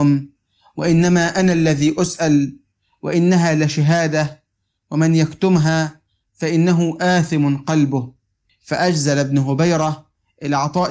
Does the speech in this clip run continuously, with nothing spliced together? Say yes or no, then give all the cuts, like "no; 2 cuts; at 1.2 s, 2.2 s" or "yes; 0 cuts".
yes; 0 cuts